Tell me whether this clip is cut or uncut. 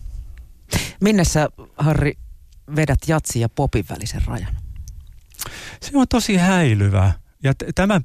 uncut